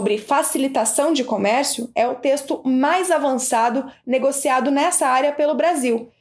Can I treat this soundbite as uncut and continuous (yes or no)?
yes